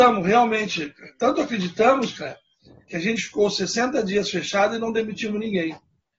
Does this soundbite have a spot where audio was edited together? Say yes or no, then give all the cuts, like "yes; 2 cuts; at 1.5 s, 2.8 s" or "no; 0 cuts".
no; 0 cuts